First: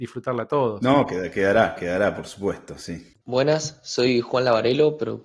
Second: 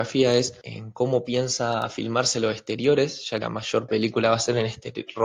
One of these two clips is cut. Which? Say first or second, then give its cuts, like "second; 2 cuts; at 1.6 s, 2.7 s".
second; 2 cuts; at 3.4 s, 3.9 s